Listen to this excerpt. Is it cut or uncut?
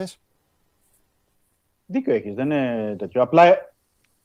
uncut